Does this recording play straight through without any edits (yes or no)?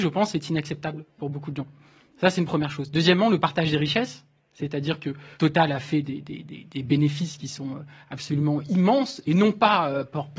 no